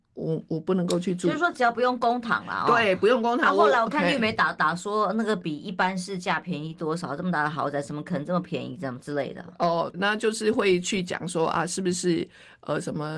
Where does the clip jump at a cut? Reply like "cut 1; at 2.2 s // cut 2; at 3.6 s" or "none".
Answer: cut 1; at 9.9 s

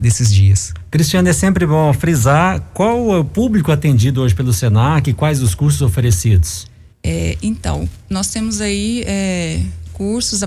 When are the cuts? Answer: cut 1; at 6.9 s

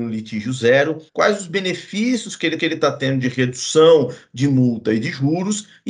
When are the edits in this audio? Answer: cut 1; at 1.1 s // cut 2; at 2.6 s

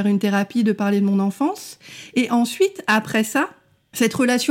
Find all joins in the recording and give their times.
none

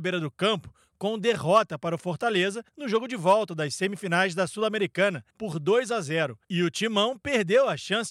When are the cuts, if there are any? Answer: cut 1; at 2.7 s // cut 2; at 5.3 s // cut 3; at 6.4 s

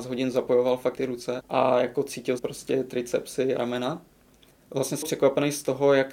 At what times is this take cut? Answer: cut 1; at 1.0 s // cut 2; at 1.4 s // cut 3; at 2.4 s // cut 4; at 3.6 s // cut 5; at 5.0 s

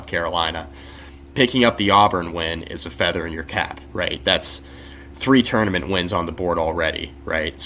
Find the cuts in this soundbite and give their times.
none

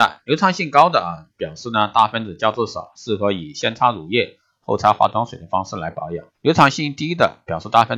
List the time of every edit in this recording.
cut 1; at 6.3 s

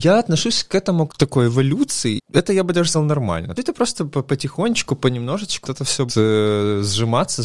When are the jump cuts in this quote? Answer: cut 1; at 1.1 s // cut 2; at 2.2 s // cut 3; at 2.9 s // cut 4; at 3.6 s // cut 5; at 5.6 s // cut 6; at 6.1 s

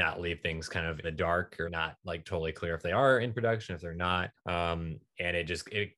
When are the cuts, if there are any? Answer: cut 1; at 1.0 s // cut 2; at 1.7 s // cut 3; at 4.4 s

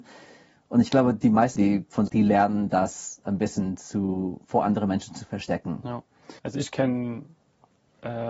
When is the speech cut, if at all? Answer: cut 1; at 1.6 s // cut 2; at 2.1 s // cut 3; at 6.4 s

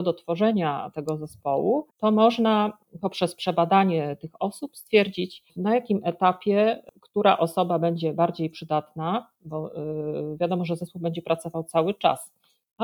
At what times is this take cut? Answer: cut 1; at 1.9 s // cut 2; at 5.5 s

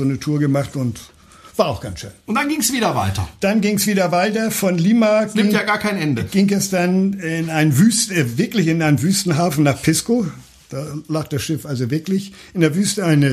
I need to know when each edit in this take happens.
none

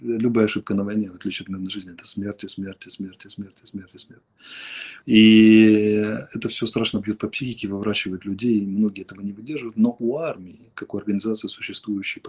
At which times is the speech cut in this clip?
cut 1; at 5.0 s

